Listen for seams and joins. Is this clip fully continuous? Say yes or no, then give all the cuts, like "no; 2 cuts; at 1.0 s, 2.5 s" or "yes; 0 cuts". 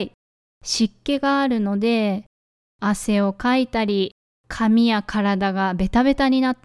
yes; 0 cuts